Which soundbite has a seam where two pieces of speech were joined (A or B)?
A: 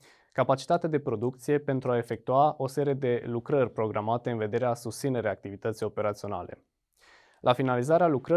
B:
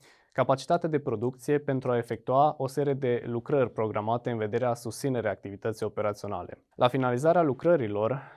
B